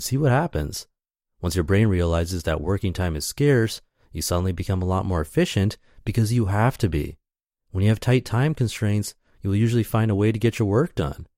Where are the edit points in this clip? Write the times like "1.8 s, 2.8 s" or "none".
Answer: none